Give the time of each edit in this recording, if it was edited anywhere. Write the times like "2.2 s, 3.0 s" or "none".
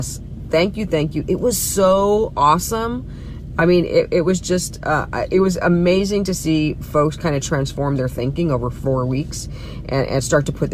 none